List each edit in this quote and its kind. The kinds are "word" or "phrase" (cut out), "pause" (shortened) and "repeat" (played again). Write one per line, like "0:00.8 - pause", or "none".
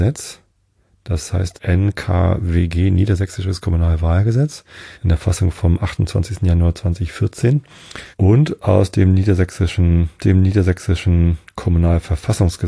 0:01.5 - word
0:04.9 - pause
0:08.1 - pause
0:10.2 - repeat